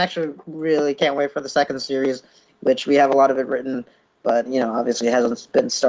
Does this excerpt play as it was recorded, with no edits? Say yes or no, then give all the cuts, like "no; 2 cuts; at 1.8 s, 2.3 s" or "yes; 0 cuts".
no; 1 cut; at 4.5 s